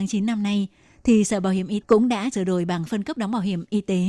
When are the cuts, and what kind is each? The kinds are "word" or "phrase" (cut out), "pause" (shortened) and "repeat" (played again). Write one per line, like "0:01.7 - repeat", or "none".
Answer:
0:01.8 - word
0:02.3 - word
0:03.1 - word